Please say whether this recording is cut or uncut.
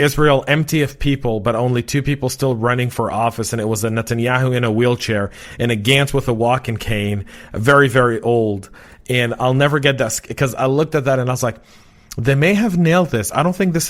uncut